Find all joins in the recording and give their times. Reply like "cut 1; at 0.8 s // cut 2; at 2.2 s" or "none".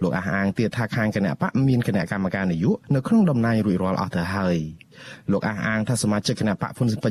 cut 1; at 2.8 s